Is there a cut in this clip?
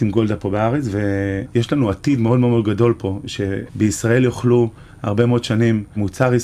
no; 0 cuts

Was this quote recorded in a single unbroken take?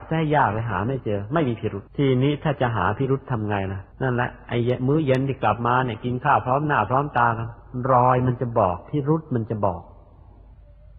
no; 2 cuts; at 1.9 s, 3.9 s

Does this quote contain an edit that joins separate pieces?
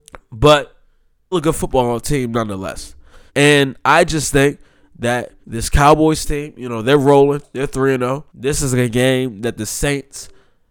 yes; 4 cuts; at 1.3 s, 3.3 s, 5.4 s, 8.3 s

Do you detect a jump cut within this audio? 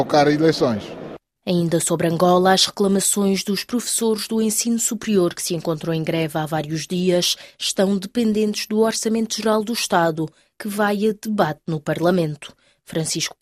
no; 0 cuts

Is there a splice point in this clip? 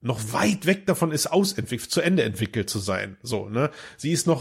no; 0 cuts

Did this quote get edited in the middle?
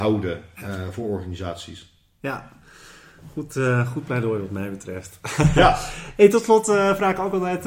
no; 0 cuts

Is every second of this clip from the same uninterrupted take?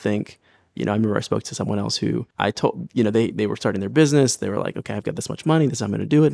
no; 1 cut; at 2.3 s

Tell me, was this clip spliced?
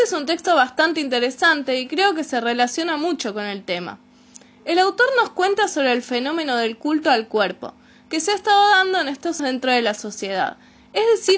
yes; 1 cut; at 9.4 s

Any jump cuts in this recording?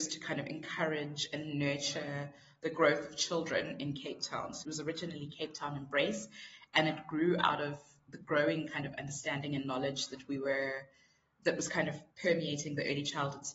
yes; 3 cuts; at 4.6 s, 8.1 s, 12.1 s

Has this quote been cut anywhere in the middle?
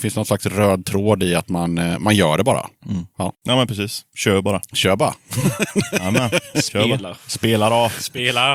no; 0 cuts

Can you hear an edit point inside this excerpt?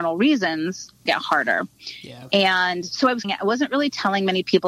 yes; 2 cuts; at 1.1 s, 3.2 s

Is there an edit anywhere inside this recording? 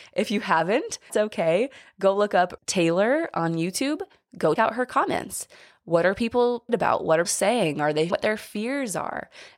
yes; 6 cuts; at 1.1 s, 2.6 s, 4.6 s, 6.7 s, 7.2 s, 8.1 s

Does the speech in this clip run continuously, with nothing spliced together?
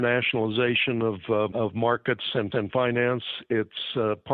no; 2 cuts; at 1.5 s, 2.5 s

